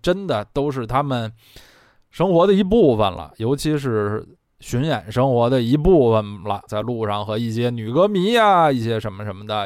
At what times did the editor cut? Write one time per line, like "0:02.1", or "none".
0:06.7